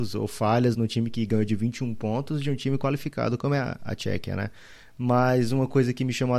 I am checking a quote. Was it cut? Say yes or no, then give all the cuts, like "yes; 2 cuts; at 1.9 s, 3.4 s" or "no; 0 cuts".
no; 0 cuts